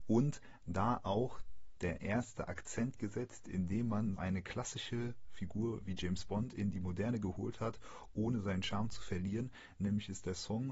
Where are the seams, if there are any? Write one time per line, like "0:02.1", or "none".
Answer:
0:04.2